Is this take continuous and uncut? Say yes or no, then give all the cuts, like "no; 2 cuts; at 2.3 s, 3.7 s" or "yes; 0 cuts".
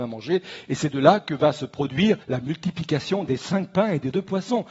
no; 1 cut; at 2.2 s